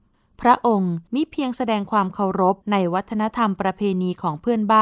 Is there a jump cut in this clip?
yes; 2 cuts; at 1.1 s, 2.6 s

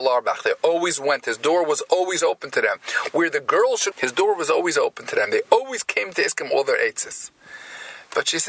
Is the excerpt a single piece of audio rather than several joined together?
no; 1 cut; at 3.9 s

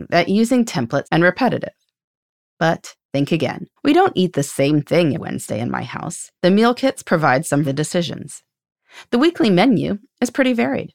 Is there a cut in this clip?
yes; 6 cuts; at 1.0 s, 3.0 s, 3.8 s, 5.2 s, 6.4 s, 7.6 s

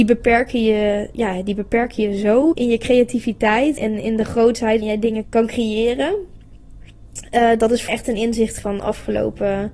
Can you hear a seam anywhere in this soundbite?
yes; 6 cuts; at 2.5 s, 3.8 s, 4.8 s, 5.2 s, 7.9 s, 8.6 s

